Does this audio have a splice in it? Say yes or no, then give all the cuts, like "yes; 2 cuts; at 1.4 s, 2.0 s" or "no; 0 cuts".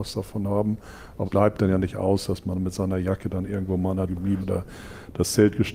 yes; 3 cuts; at 1.2 s, 4.1 s, 4.4 s